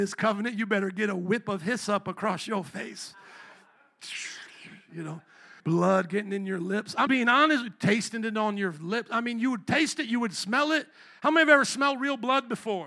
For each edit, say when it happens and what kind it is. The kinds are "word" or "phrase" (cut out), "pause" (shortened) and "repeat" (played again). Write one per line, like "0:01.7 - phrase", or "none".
0:05.6 - pause
0:07.1 - word